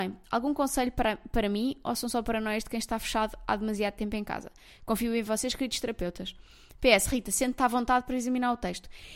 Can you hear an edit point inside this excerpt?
no; 0 cuts

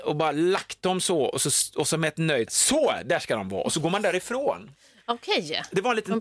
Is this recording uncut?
no; 1 cut; at 2.5 s

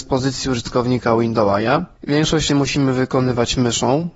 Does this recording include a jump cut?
yes; 1 cut; at 2.5 s

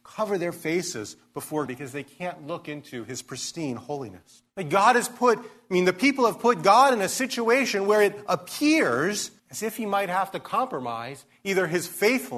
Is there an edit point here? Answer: yes; 3 cuts; at 1.7 s, 4.5 s, 9.4 s

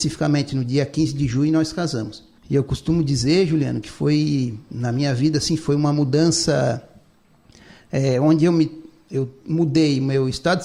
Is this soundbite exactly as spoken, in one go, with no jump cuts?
no; 1 cut; at 2.4 s

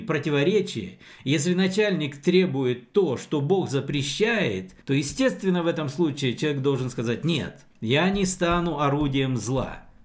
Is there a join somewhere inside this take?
yes; 2 cuts; at 4.8 s, 7.7 s

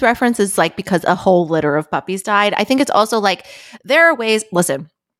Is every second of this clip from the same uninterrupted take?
yes; 0 cuts

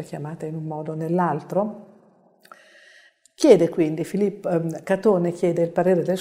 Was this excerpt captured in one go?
yes; 0 cuts

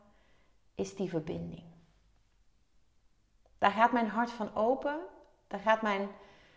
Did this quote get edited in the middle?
no; 0 cuts

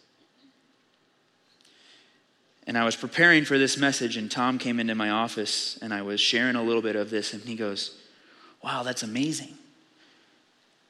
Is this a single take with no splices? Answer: yes; 0 cuts

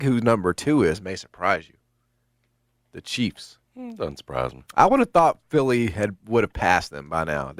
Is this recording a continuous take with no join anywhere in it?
no; 2 cuts; at 3.6 s, 4.7 s

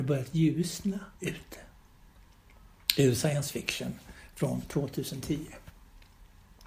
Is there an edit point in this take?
yes; 1 cut; at 1.2 s

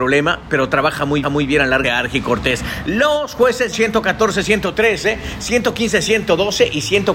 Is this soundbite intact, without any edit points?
no; 3 cuts; at 1.2 s, 1.8 s, 3.7 s

